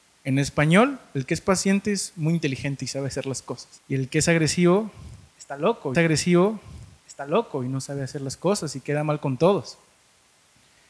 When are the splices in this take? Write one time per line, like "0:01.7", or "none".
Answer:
0:03.8
0:05.9